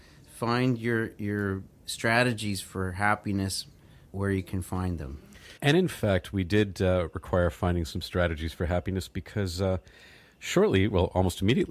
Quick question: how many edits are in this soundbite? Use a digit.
2